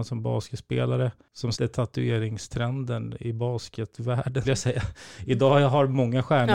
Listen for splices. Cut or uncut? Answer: cut